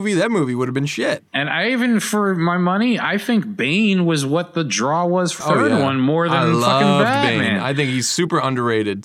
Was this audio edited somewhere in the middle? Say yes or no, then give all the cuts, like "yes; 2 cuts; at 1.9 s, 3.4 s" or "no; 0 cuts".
yes; 2 cuts; at 1.3 s, 5.4 s